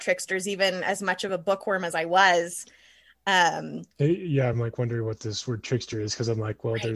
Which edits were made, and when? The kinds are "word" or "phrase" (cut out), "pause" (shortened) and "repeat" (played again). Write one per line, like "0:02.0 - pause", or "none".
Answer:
none